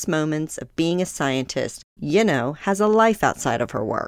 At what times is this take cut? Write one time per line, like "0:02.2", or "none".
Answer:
0:02.0